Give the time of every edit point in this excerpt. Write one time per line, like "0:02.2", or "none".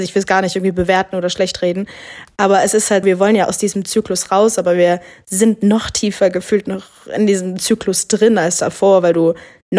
0:03.0